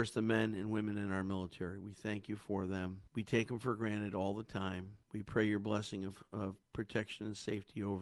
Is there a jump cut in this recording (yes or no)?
yes